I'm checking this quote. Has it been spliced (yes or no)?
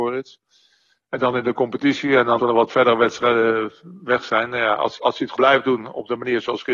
yes